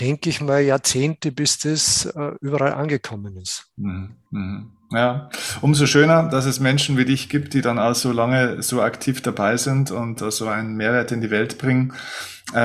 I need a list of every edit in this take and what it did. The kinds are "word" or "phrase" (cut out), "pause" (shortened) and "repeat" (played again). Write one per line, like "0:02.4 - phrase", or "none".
none